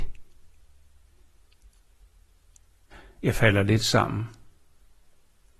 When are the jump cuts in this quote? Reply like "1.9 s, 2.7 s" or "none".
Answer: none